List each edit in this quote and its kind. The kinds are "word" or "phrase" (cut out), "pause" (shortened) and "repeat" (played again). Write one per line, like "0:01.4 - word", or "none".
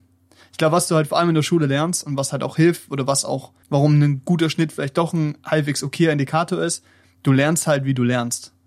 0:03.6 - pause